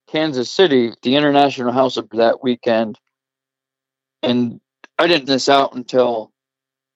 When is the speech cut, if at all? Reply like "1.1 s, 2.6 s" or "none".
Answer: 1.0 s, 2.1 s, 5.3 s